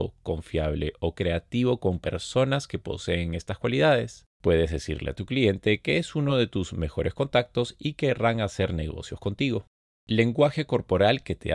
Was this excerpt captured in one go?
yes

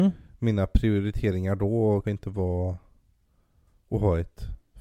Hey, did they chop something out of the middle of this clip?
yes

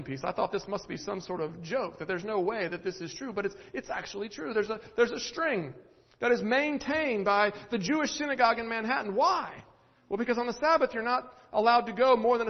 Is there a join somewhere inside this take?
no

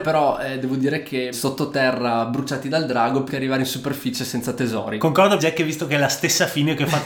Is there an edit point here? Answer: yes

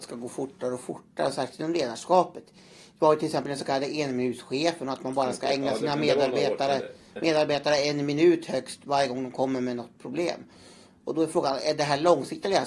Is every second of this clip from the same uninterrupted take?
yes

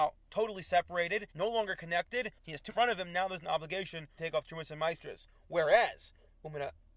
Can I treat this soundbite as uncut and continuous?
no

